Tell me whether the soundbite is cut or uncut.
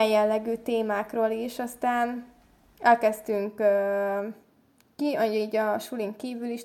uncut